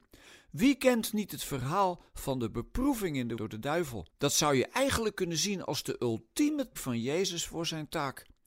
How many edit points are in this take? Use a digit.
3